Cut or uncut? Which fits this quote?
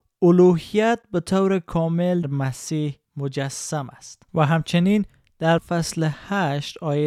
cut